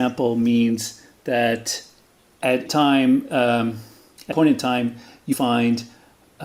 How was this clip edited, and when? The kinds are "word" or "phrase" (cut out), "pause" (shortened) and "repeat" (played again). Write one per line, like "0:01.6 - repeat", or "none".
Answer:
0:02.7 - word
0:04.3 - word
0:05.3 - word